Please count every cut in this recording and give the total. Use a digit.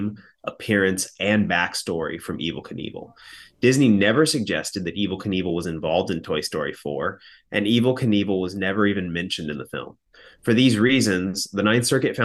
0